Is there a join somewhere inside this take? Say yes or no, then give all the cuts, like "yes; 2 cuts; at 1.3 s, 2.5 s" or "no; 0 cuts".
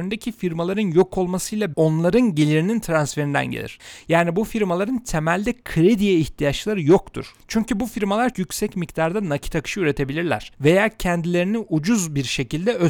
yes; 2 cuts; at 1.7 s, 8.3 s